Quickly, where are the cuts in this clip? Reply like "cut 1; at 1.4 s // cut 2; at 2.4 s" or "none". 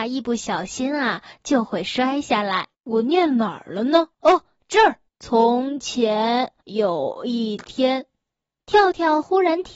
cut 1; at 2.7 s // cut 2; at 4.1 s // cut 3; at 5.1 s // cut 4; at 6.6 s